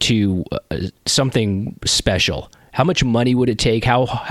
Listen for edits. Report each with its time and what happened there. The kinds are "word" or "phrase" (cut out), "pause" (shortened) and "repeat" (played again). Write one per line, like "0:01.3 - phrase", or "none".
none